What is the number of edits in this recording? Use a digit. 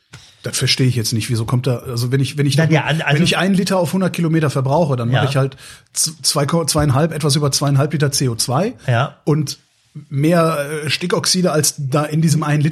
0